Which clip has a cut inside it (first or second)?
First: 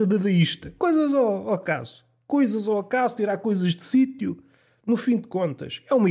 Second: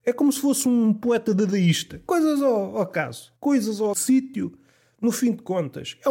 second